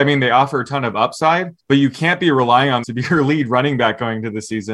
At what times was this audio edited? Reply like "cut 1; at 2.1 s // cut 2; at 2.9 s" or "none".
cut 1; at 1.6 s // cut 2; at 2.8 s